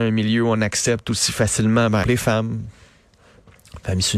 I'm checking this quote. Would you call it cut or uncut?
cut